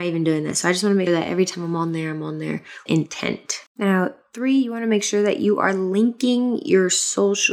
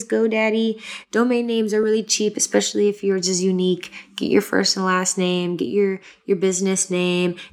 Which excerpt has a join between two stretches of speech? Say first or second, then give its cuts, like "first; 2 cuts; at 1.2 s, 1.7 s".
first; 3 cuts; at 1.1 s, 2.9 s, 3.7 s